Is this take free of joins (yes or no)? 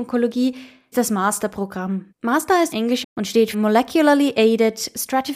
no